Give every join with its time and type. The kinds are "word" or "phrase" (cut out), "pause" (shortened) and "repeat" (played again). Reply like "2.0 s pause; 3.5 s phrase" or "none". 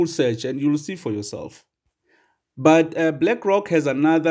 none